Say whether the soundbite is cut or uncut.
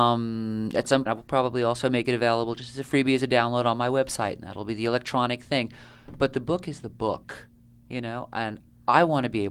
cut